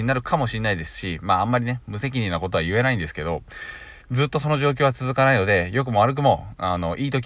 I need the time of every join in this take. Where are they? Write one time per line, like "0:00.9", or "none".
0:04.0

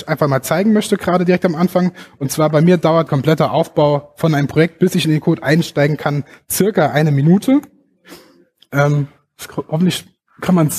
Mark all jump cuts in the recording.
0:03.1

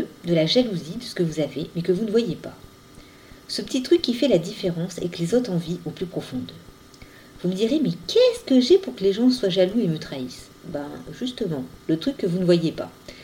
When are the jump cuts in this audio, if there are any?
none

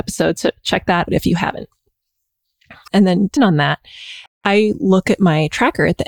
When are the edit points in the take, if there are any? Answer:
0:01.1
0:03.4

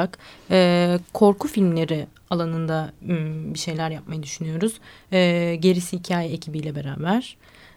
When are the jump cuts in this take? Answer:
none

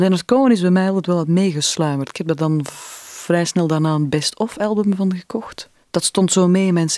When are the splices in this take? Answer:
none

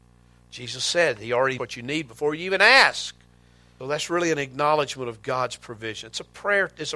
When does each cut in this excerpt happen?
0:01.6
0:03.8

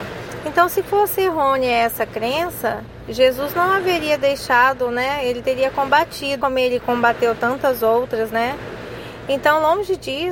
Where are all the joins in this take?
0:06.4

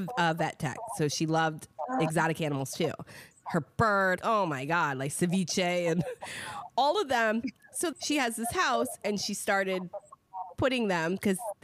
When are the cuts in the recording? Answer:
0:04.2
0:07.9

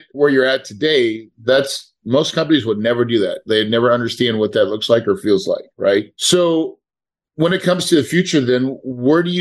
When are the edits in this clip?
0:06.2

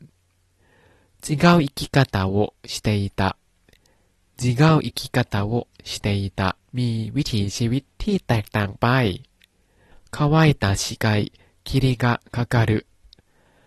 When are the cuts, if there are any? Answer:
0:06.6

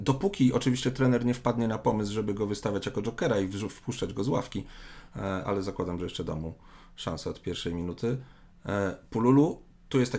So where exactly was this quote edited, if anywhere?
none

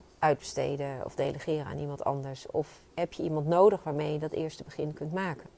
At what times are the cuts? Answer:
0:02.9

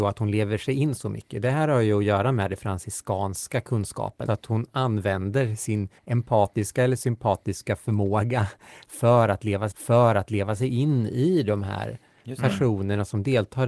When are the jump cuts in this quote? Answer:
0:04.3
0:06.0
0:09.7

